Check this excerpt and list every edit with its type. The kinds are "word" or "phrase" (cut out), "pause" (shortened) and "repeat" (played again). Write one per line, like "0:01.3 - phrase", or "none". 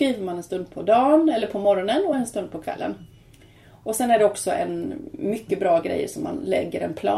none

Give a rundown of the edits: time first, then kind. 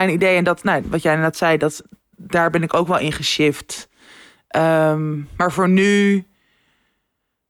none

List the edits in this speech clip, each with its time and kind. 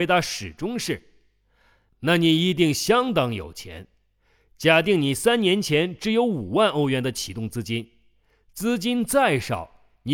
none

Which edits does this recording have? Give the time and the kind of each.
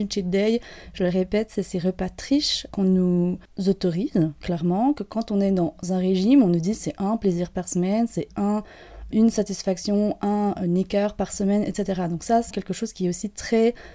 0:02.7 - word
0:09.1 - word
0:12.5 - word

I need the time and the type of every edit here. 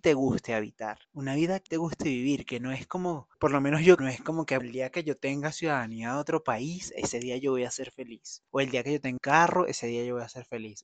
0:01.0 - pause
0:01.7 - phrase
0:03.3 - pause
0:04.0 - phrase
0:04.6 - word
0:08.5 - pause
0:09.2 - word

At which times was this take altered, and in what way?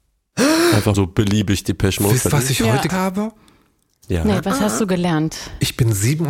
0:00.9 - word
0:02.3 - word
0:02.9 - word

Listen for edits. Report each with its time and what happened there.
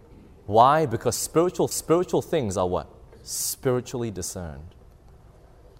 0:01.7 - repeat
0:03.1 - pause

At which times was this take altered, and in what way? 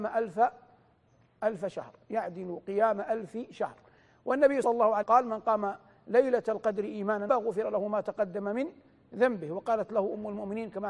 0:04.6 - word
0:05.0 - word
0:07.3 - word

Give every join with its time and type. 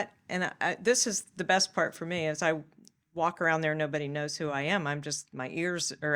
none

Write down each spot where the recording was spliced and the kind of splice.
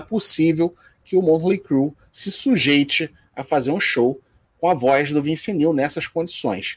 none

